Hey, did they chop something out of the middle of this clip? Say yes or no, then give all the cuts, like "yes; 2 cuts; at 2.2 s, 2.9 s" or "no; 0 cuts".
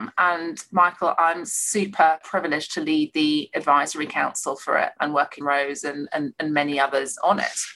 yes; 2 cuts; at 5.0 s, 5.4 s